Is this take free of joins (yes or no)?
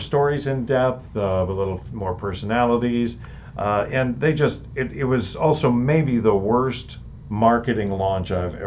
yes